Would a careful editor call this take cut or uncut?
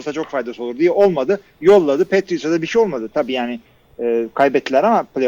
uncut